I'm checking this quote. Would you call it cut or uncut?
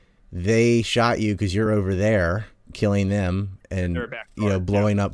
uncut